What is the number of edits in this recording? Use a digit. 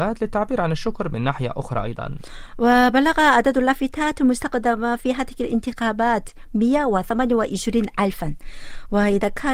0